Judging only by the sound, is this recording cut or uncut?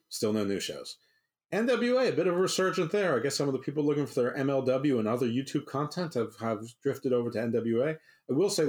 uncut